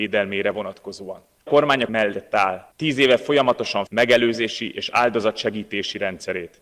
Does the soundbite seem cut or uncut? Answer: cut